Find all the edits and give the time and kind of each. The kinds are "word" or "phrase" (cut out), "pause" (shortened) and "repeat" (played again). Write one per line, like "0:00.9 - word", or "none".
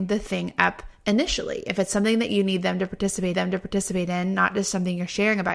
0:03.3 - repeat